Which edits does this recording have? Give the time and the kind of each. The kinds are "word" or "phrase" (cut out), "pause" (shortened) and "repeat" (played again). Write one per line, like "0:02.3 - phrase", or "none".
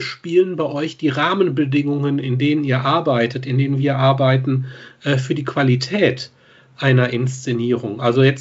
none